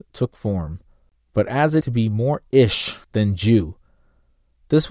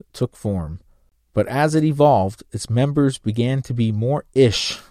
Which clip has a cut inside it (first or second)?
first